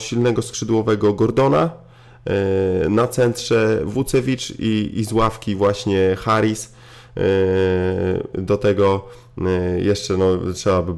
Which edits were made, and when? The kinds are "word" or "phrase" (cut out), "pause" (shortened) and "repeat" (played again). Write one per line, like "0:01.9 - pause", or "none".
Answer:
none